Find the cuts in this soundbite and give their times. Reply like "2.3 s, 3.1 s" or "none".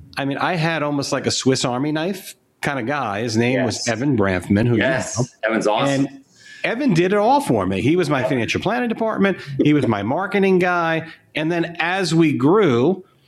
none

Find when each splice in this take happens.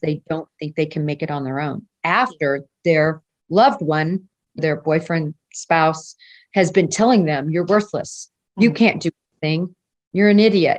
4.6 s

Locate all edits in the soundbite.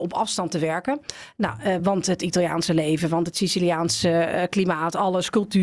none

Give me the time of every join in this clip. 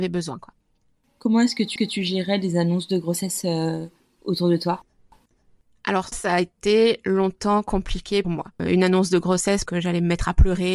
1.8 s, 6.1 s, 8.2 s, 9.7 s

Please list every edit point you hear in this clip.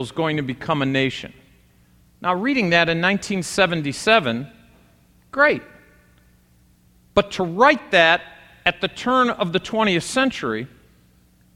none

